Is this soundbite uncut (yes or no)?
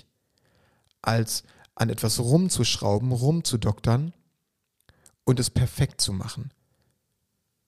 yes